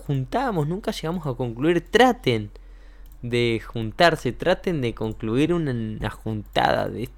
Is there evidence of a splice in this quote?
no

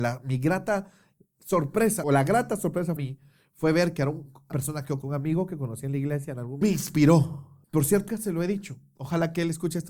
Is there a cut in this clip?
yes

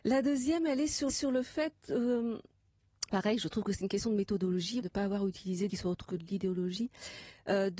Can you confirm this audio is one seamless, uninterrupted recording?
no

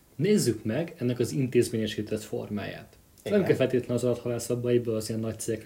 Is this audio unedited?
yes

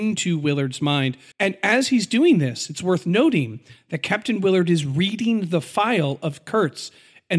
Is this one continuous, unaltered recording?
no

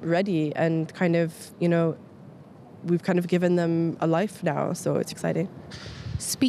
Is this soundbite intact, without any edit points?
no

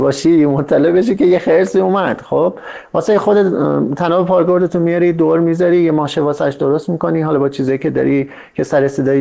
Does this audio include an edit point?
no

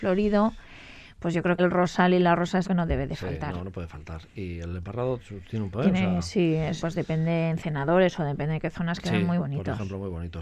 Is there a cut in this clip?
yes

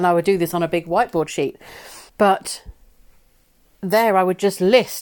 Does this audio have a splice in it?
yes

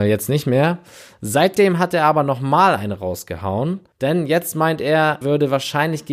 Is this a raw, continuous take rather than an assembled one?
no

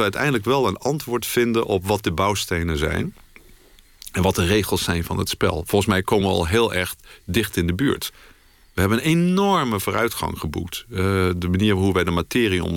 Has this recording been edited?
no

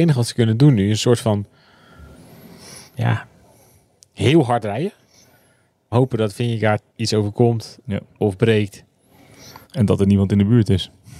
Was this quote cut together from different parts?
yes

